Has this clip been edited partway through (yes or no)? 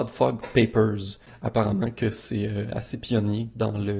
no